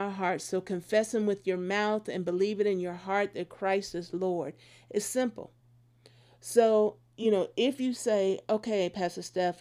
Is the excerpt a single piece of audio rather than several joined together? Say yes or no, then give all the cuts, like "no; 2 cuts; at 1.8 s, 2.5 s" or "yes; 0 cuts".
yes; 0 cuts